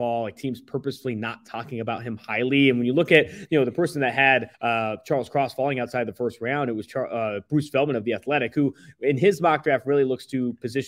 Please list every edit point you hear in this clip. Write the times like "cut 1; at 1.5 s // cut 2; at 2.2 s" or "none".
cut 1; at 4.5 s